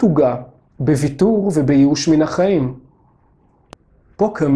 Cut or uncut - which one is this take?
uncut